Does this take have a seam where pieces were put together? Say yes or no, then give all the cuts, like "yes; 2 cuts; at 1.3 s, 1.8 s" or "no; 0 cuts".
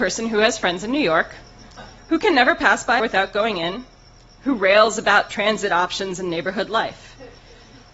yes; 2 cuts; at 2.0 s, 3.0 s